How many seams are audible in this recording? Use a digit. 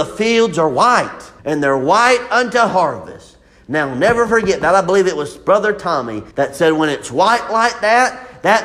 2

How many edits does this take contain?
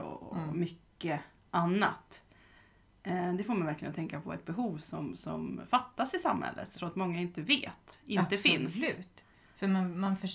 1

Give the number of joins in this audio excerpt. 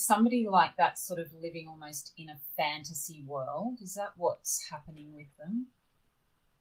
0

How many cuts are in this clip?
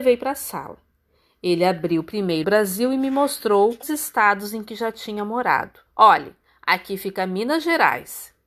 3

